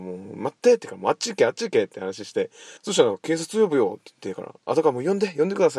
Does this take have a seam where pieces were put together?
yes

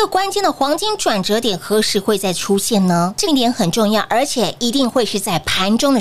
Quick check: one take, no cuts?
no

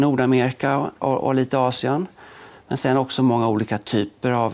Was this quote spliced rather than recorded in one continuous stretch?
yes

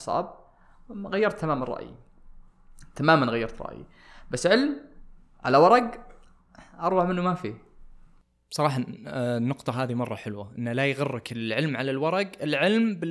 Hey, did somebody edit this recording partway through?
no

